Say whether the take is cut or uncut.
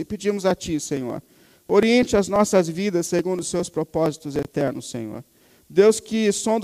uncut